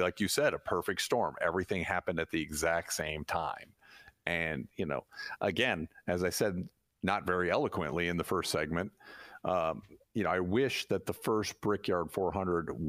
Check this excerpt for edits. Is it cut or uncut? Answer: uncut